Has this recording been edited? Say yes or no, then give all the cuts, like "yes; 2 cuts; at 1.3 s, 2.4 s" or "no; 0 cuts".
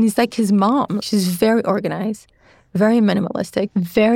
no; 0 cuts